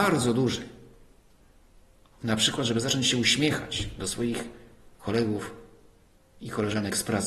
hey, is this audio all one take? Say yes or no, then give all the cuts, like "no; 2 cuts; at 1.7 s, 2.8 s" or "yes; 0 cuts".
yes; 0 cuts